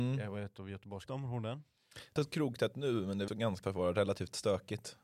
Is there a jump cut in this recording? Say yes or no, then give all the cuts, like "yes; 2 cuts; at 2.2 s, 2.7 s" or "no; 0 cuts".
yes; 4 cuts; at 1.1 s, 2.2 s, 3.3 s, 3.6 s